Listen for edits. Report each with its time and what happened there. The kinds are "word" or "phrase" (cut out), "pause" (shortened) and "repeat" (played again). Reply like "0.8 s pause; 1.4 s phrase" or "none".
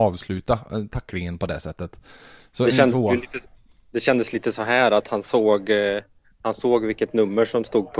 none